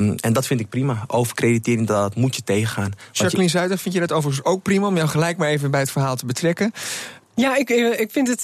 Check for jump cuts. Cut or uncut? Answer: cut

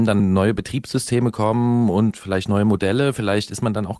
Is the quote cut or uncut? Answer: uncut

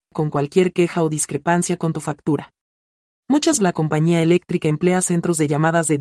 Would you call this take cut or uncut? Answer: cut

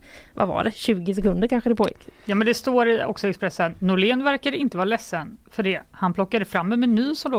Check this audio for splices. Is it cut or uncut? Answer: uncut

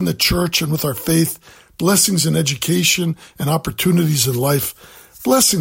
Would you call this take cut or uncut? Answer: uncut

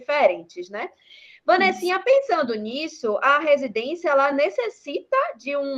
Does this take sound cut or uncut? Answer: uncut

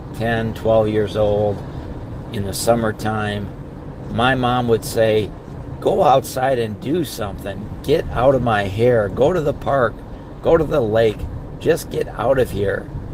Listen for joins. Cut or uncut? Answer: uncut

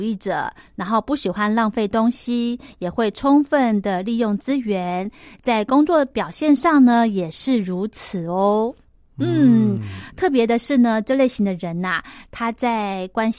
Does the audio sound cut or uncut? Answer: uncut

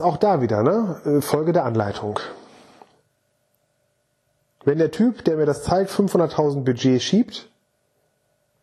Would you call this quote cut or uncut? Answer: uncut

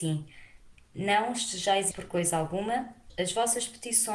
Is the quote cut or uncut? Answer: cut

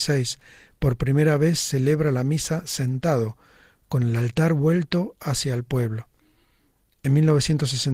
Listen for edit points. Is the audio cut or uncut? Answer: uncut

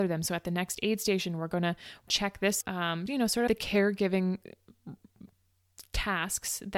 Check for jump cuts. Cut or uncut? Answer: cut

